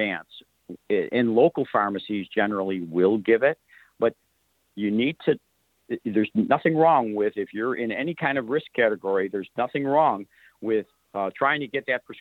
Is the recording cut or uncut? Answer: uncut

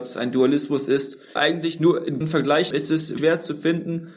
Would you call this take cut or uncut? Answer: cut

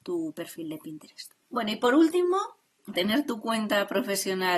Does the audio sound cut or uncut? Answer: cut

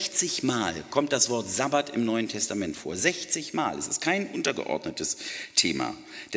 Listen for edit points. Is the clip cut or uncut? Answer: uncut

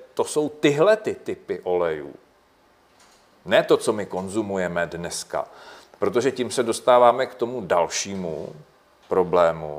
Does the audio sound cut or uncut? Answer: uncut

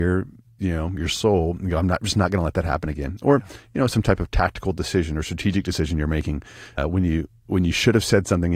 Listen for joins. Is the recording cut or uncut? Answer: cut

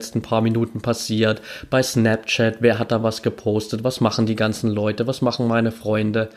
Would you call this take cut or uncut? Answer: uncut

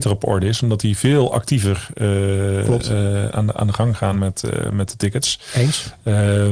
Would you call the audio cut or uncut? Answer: uncut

